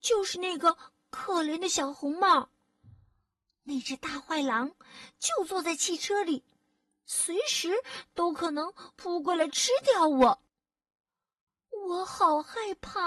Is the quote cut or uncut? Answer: uncut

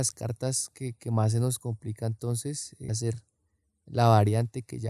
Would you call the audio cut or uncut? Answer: cut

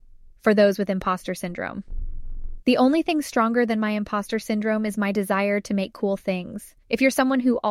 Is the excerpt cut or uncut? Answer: cut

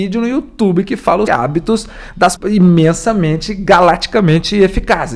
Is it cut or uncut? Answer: cut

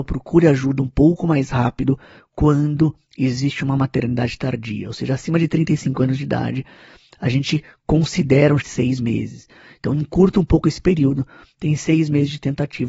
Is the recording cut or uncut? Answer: cut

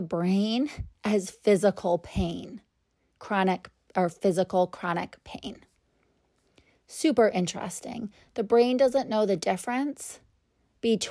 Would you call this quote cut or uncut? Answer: uncut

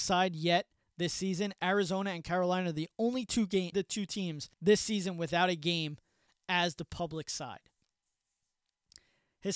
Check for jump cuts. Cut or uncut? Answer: cut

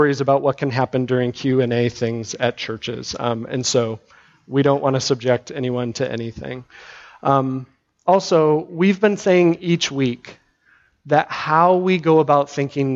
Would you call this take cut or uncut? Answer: uncut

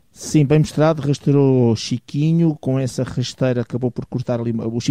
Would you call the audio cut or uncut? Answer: uncut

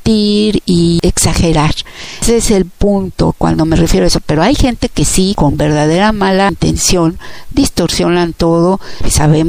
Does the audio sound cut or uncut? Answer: uncut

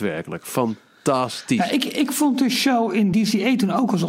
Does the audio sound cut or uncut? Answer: uncut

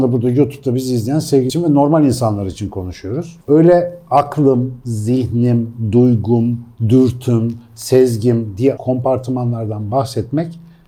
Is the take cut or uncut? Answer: cut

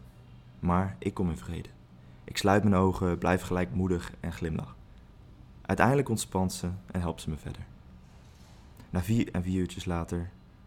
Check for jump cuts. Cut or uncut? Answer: uncut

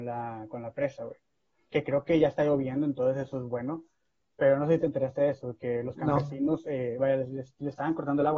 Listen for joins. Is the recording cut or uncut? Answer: uncut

